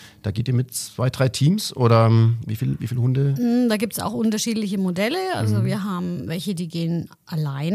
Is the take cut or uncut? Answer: uncut